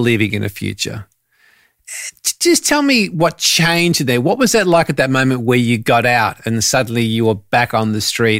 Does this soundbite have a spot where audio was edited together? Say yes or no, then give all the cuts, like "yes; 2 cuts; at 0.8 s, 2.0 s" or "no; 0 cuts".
no; 0 cuts